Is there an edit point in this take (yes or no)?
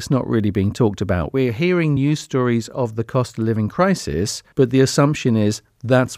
no